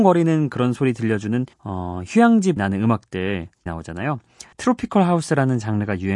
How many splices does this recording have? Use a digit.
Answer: 4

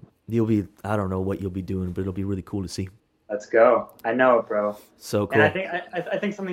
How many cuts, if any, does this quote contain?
1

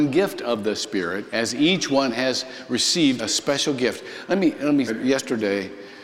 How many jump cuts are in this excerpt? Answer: 3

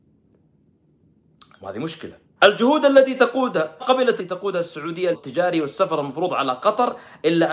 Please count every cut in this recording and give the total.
5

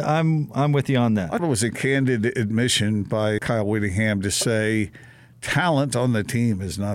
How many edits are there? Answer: 2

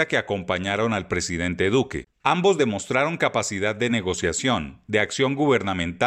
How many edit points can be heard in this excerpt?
0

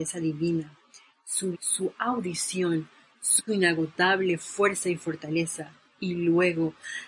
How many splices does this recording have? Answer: 2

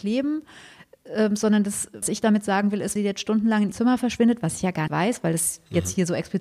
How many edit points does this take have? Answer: 4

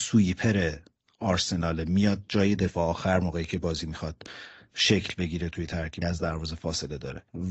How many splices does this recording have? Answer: 1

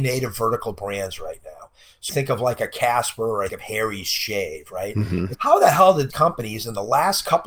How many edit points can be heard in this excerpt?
4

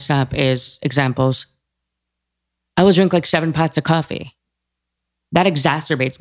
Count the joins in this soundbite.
0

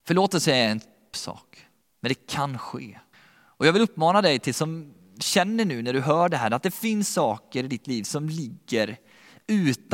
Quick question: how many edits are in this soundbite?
3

